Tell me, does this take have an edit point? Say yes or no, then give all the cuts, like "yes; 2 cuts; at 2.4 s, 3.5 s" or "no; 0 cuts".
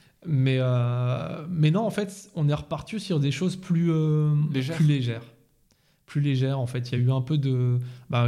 no; 0 cuts